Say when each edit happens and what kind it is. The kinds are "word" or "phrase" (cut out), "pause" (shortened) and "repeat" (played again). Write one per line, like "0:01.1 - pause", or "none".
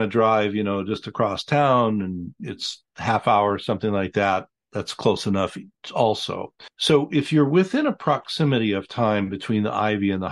0:06.7 - pause